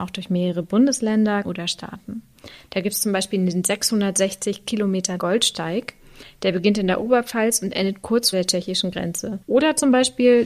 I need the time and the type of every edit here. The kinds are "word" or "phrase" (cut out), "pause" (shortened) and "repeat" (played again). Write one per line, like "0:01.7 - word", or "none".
0:01.4 - word
0:05.2 - word
0:08.3 - word
0:09.4 - pause